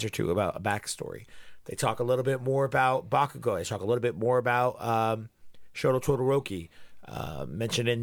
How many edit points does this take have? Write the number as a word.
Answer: zero